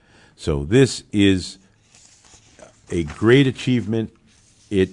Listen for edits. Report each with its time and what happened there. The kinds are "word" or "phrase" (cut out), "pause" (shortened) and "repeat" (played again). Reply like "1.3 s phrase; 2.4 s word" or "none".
none

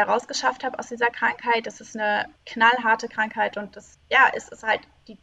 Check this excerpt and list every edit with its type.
2.4 s pause

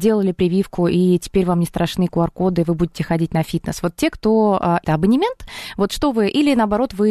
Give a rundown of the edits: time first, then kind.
4.8 s word

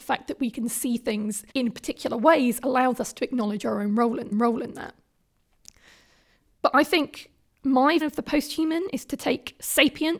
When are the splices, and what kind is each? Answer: 1.5 s pause; 4.3 s repeat; 8.0 s word

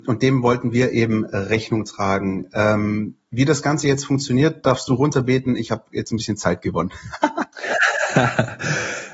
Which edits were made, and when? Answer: none

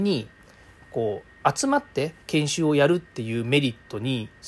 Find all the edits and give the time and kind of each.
2.2 s pause

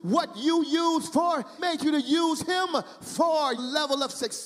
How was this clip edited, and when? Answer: 1.6 s word; 3.6 s word

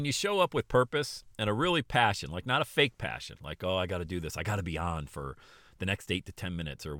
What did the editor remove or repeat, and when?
1.3 s pause

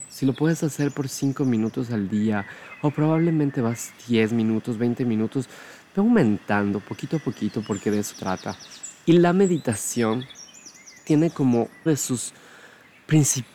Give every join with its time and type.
4.0 s pause; 8.1 s word; 11.9 s word

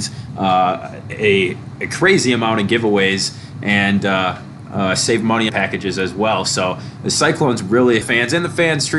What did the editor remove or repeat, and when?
5.5 s phrase; 8.0 s phrase

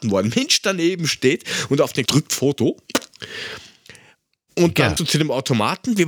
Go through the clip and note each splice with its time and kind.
2.1 s word; 5.0 s word

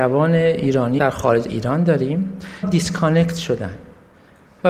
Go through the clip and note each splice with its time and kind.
1.0 s word; 1.4 s word; 2.6 s phrase

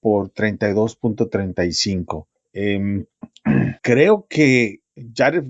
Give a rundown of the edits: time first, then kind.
3.8 s pause

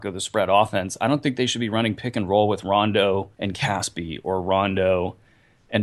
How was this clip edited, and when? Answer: 3.3 s pause

